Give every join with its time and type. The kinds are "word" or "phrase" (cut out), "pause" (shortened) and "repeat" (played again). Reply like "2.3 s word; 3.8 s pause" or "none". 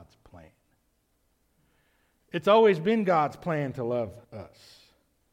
4.2 s pause